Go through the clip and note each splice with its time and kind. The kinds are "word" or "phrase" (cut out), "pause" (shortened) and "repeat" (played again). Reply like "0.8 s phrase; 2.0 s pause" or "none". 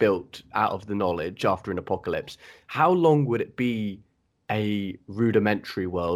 none

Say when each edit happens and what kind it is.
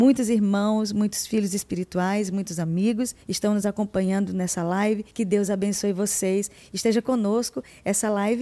3.2 s pause; 5.1 s pause

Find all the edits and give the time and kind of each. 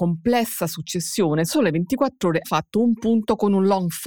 1.5 s word; 2.4 s word

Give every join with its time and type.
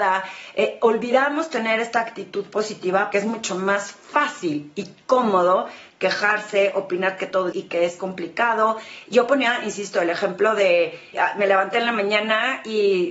3.1 s word; 7.5 s word; 11.1 s word

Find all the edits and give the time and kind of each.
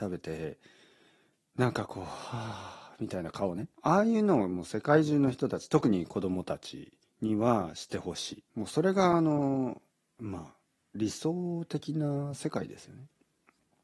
3.7 s pause; 7.0 s pause; 8.5 s pause; 9.9 s pause; 10.8 s pause

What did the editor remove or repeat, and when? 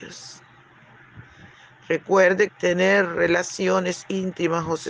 2.5 s phrase

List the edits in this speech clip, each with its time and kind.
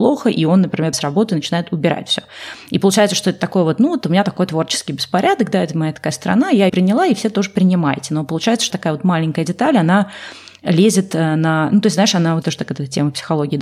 0.9 s word; 6.7 s word; 8.7 s word; 12.4 s word

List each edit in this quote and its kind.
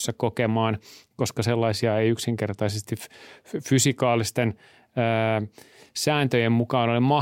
none

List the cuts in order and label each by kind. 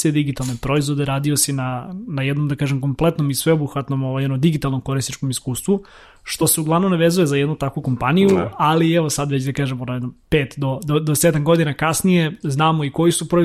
none

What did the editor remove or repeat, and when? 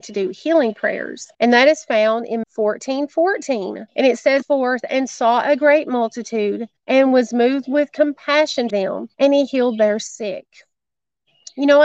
1.3 s pause; 2.4 s word; 3.9 s pause; 4.4 s phrase; 6.8 s pause; 8.7 s word; 9.1 s pause

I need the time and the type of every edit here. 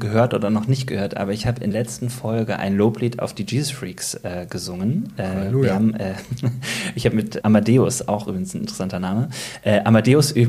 1.7 s word; 7.4 s word

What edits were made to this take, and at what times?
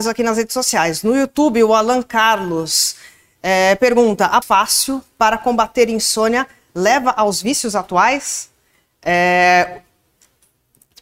4.4 s phrase

